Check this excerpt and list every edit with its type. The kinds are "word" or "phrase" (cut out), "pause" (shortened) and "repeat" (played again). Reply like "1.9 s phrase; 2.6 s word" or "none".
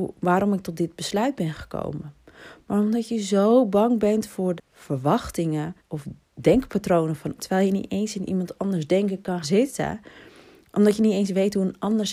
4.6 s word; 5.8 s pause; 7.4 s word; 9.4 s word